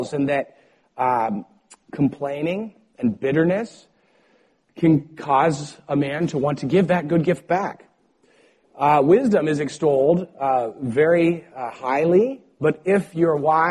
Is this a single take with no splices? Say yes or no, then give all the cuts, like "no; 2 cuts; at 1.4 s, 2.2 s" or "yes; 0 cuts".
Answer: yes; 0 cuts